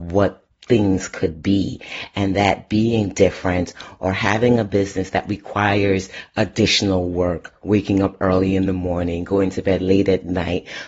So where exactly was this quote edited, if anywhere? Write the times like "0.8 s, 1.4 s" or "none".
none